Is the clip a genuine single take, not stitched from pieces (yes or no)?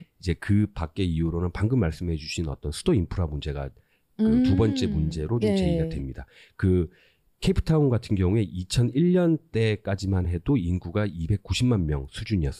yes